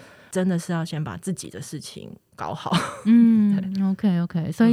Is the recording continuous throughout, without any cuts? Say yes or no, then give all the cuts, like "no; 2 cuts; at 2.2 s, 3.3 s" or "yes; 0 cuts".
yes; 0 cuts